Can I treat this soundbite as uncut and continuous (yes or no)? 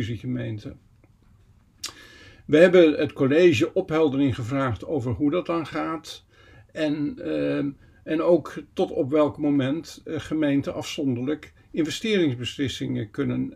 yes